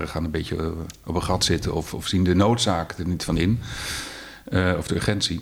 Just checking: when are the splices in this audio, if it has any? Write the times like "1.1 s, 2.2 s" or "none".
none